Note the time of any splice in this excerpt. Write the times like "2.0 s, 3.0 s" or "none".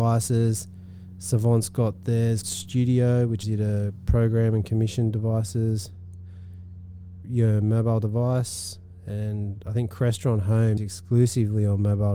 2.4 s, 3.4 s, 7.2 s, 10.8 s